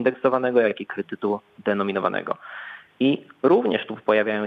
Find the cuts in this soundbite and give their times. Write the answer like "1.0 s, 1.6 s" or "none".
none

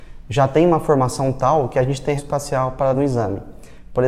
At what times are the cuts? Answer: 2.2 s, 2.9 s

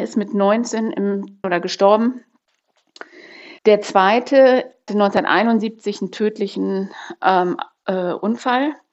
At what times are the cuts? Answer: 1.4 s, 3.6 s, 4.9 s

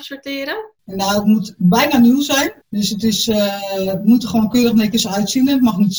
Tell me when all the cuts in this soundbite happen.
2.6 s

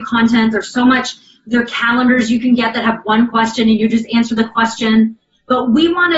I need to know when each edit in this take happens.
none

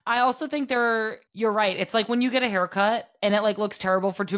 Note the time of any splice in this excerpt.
1.3 s

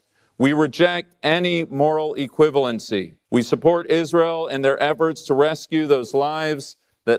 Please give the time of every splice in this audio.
3.2 s

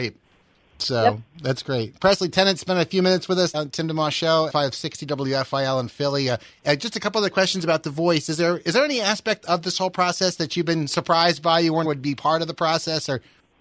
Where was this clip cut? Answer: 3.5 s, 4.5 s, 11.8 s

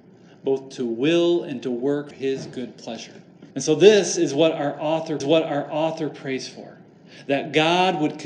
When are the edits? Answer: 2.1 s, 3.5 s, 5.2 s

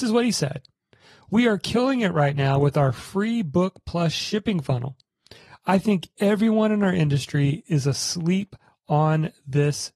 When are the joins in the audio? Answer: none

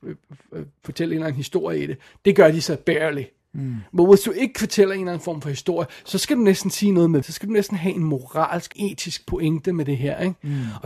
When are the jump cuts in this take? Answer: 7.2 s, 8.7 s

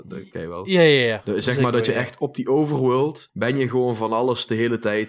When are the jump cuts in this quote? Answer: 3.3 s

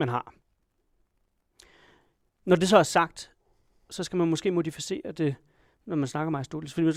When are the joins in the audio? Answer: none

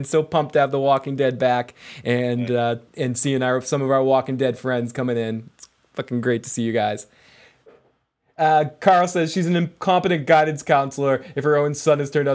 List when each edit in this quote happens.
2.9 s

